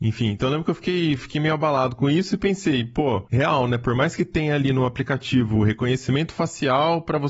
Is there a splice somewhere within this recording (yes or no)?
no